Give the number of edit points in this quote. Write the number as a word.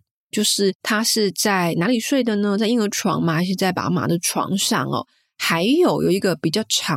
zero